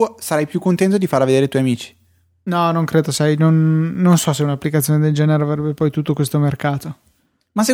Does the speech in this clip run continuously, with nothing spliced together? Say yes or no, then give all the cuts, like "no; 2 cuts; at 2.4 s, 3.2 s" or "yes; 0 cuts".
yes; 0 cuts